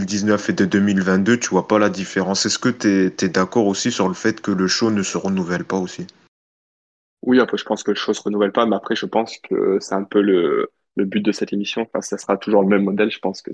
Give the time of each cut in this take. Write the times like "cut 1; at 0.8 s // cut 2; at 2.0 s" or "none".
none

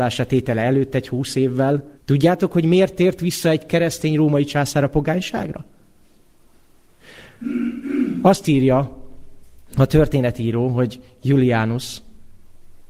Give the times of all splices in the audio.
cut 1; at 1.9 s

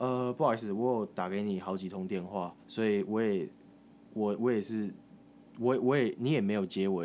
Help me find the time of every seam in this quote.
cut 1; at 2.6 s

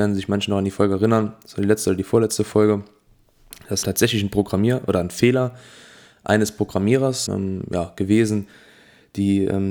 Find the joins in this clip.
cut 1; at 3.8 s // cut 2; at 7.3 s

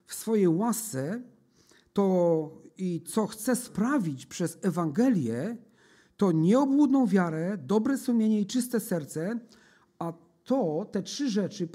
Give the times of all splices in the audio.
none

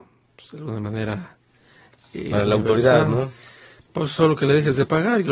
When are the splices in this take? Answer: none

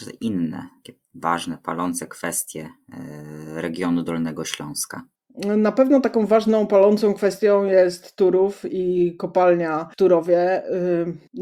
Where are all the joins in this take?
none

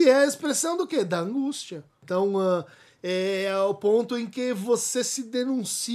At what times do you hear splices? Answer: none

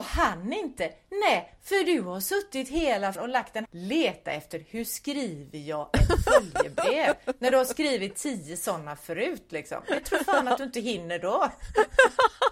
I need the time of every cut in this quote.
cut 1; at 3.2 s // cut 2; at 3.7 s

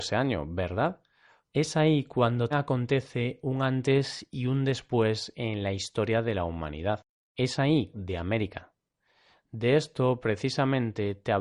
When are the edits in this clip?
cut 1; at 2.5 s // cut 2; at 7.1 s // cut 3; at 7.9 s

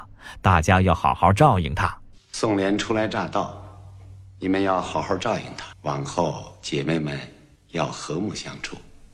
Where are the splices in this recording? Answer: cut 1; at 5.7 s

